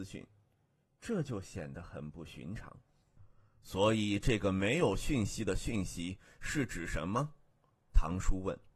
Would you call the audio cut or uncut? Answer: uncut